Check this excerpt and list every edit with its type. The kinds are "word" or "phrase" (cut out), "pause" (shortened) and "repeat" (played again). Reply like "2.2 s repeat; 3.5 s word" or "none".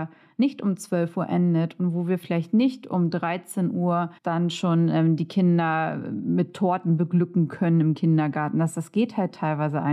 4.2 s pause